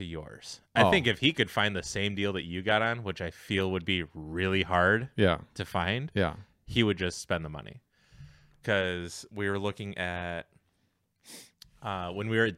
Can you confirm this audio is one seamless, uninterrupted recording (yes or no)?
yes